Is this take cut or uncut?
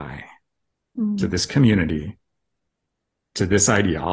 uncut